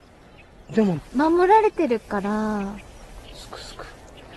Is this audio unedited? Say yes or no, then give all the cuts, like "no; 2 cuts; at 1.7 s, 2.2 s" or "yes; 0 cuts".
no; 2 cuts; at 1.1 s, 3.2 s